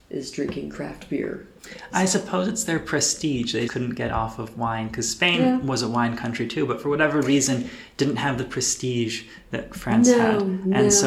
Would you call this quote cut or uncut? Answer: cut